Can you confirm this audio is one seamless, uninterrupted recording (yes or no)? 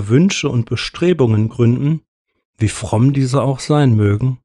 yes